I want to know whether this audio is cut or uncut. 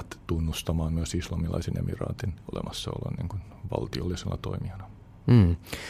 uncut